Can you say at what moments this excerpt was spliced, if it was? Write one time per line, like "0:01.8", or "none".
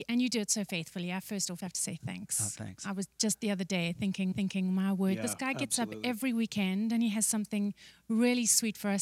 0:01.6
0:04.3